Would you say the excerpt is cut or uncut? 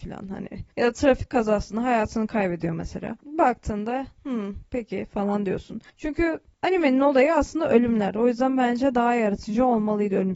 cut